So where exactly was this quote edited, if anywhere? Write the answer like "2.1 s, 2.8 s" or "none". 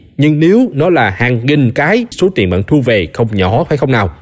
2.1 s